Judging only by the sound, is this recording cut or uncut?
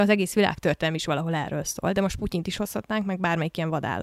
uncut